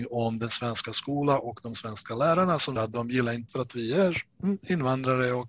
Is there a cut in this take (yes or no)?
yes